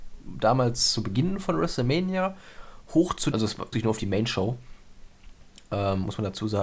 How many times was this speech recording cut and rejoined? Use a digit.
2